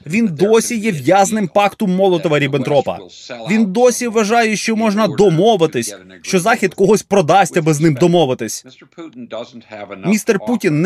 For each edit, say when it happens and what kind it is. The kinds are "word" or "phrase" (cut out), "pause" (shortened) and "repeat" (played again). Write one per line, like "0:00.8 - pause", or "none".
none

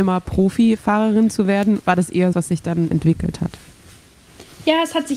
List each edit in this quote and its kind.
0:01.8 - word
0:02.3 - word
0:02.9 - word

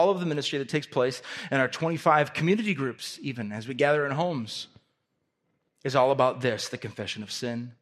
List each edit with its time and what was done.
none

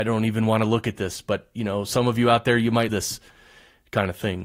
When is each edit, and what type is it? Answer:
0:02.9 - word

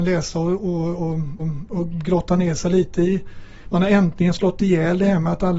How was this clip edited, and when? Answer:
0:01.4 - repeat

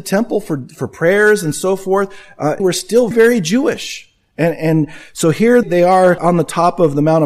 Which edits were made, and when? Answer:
0:02.6 - phrase
0:03.1 - word
0:05.6 - word
0:06.2 - word

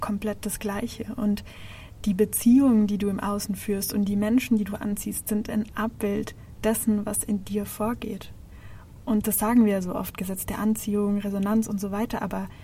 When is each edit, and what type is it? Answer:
0:09.2 - word

